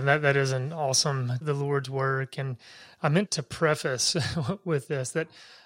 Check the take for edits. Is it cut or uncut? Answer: cut